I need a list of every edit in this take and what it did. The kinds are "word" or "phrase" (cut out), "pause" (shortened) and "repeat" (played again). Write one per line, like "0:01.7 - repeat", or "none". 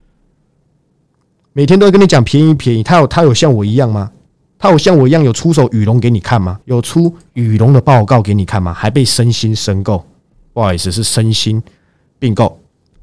0:02.6 - phrase
0:06.6 - pause